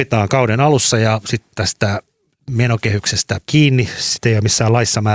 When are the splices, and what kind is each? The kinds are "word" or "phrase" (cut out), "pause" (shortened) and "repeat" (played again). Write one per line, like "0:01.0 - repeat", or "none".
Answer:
0:03.5 - word